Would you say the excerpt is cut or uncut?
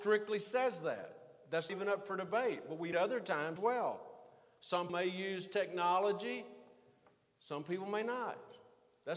cut